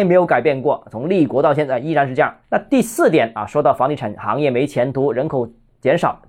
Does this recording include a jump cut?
no; 0 cuts

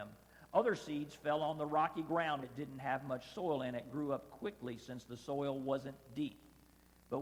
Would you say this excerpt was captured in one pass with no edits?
no; 1 cut; at 2.4 s

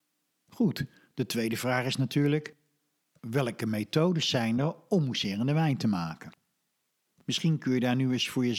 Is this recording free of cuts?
yes; 0 cuts

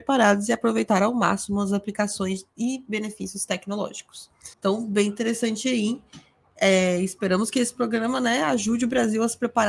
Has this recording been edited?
yes; 1 cut; at 4.5 s

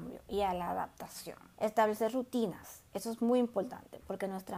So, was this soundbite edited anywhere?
yes; 1 cut; at 1.5 s

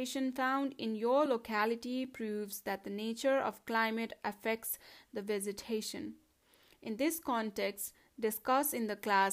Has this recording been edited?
no; 0 cuts

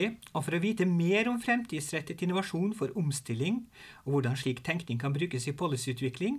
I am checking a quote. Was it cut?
no; 0 cuts

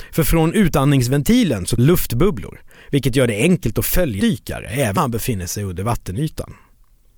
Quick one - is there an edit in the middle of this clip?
yes; 3 cuts; at 1.8 s, 4.2 s, 5.0 s

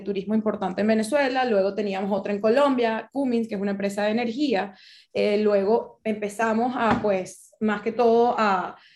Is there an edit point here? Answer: no; 0 cuts

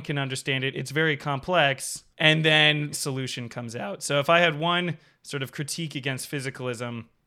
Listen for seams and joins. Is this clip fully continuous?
no; 2 cuts; at 2.1 s, 2.9 s

